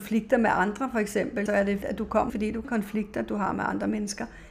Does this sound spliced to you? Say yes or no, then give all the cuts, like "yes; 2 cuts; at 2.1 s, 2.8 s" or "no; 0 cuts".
yes; 4 cuts; at 1.5 s, 1.8 s, 2.3 s, 2.6 s